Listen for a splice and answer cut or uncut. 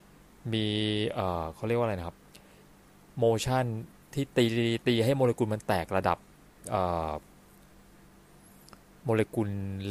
uncut